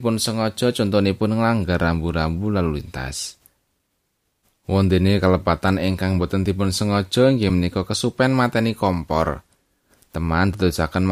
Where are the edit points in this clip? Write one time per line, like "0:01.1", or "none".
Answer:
none

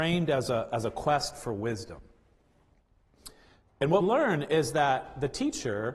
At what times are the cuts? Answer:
0:04.0

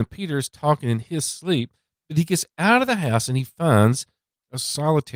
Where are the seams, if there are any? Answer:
none

